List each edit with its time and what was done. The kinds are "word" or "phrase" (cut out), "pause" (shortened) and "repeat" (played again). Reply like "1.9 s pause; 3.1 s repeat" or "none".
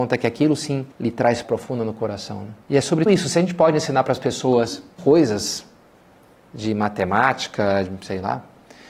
0.9 s pause; 1.4 s word; 2.6 s pause; 3.1 s word; 5.0 s word